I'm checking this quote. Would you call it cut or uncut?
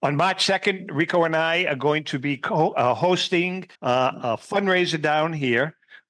cut